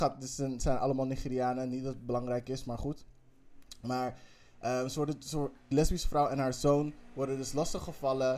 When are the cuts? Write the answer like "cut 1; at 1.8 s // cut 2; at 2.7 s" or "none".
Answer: cut 1; at 5.7 s